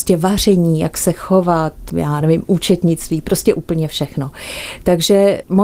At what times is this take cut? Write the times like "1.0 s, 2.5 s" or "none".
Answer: none